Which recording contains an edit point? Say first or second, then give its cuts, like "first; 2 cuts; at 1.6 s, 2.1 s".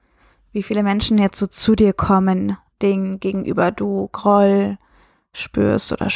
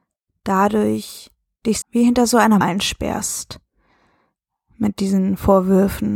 second; 2 cuts; at 1.8 s, 2.6 s